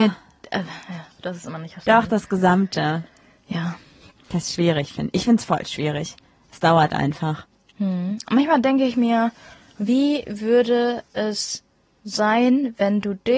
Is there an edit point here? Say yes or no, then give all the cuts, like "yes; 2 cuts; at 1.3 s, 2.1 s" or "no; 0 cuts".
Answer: no; 0 cuts